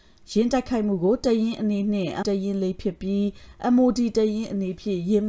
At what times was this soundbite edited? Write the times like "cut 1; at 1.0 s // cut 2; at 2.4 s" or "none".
cut 1; at 2.2 s